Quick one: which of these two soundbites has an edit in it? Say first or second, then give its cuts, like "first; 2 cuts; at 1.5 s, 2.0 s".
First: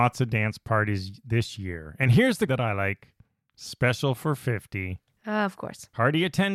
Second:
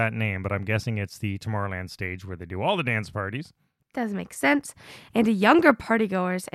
first; 1 cut; at 2.5 s